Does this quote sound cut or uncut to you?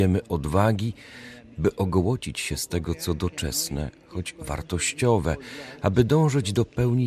uncut